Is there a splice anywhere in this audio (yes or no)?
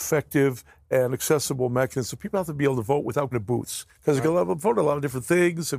yes